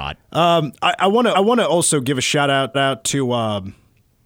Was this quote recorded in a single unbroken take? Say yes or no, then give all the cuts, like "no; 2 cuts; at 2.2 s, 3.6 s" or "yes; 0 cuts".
no; 2 cuts; at 1.3 s, 2.7 s